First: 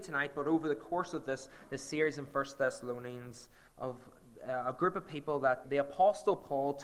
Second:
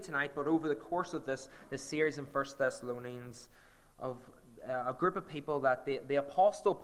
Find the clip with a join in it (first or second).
first